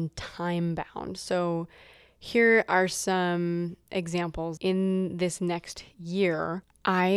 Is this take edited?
yes; 1 cut; at 4.6 s

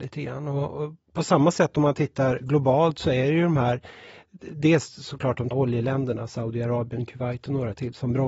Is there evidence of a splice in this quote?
yes; 1 cut; at 5.5 s

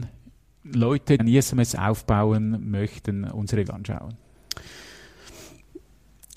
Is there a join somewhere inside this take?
yes; 2 cuts; at 1.2 s, 3.7 s

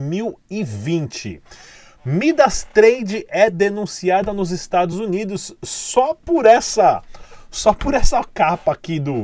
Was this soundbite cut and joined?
no; 0 cuts

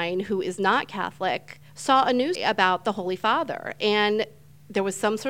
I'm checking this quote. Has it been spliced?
yes; 2 cuts; at 1.7 s, 2.4 s

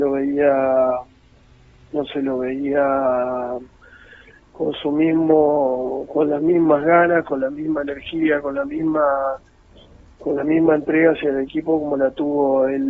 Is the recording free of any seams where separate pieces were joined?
yes; 0 cuts

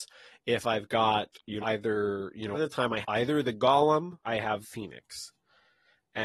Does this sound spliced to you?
yes; 5 cuts; at 1.6 s, 2.5 s, 3.0 s, 4.2 s, 4.6 s

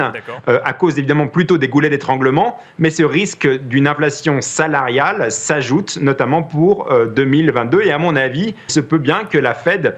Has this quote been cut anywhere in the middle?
yes; 1 cut; at 8.7 s

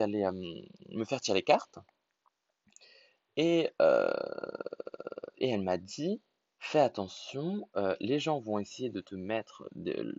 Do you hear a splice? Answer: no; 0 cuts

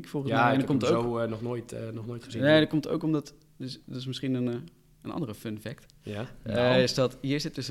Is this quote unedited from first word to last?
yes; 0 cuts

